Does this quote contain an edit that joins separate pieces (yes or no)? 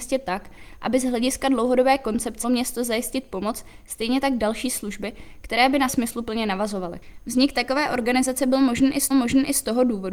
yes